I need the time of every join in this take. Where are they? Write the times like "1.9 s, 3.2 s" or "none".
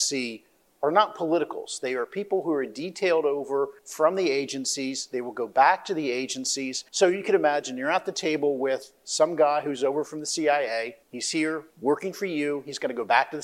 3.8 s, 6.9 s, 11.0 s, 11.7 s

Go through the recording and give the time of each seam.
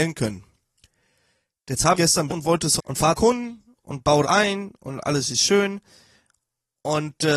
1.9 s, 2.3 s, 2.8 s, 3.1 s, 4.2 s

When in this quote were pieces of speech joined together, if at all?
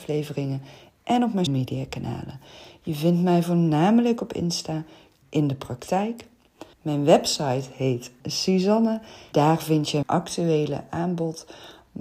1.5 s, 5.2 s, 6.7 s, 8.2 s, 9.3 s, 10.0 s

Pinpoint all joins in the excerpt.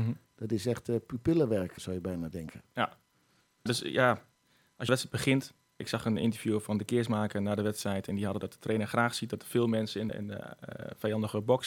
1.8 s, 3.7 s, 4.9 s, 5.8 s, 8.4 s, 10.1 s

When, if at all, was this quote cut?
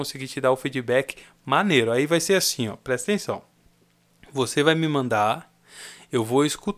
none

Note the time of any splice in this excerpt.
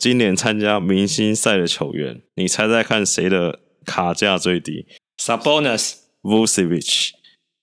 2.3 s, 5.0 s

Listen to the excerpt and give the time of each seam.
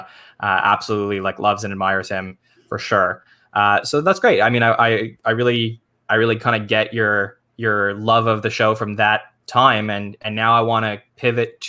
none

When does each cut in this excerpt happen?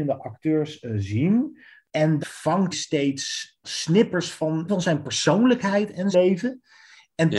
2.2 s, 2.7 s, 3.6 s, 4.7 s, 6.1 s

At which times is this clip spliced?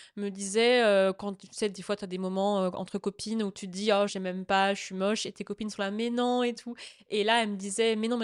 4.1 s

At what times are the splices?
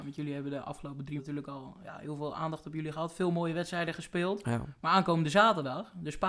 1.2 s

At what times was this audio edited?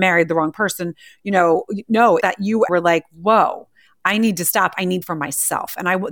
2.2 s, 2.7 s, 5.0 s

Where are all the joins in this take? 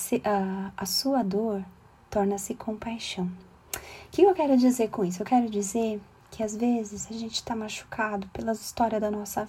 none

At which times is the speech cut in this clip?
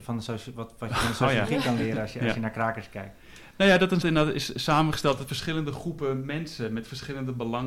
4.0 s

